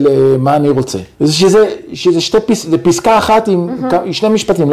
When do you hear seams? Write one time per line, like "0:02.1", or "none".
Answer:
0:01.1